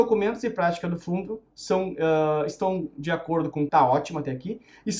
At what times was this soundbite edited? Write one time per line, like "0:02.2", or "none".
0:03.7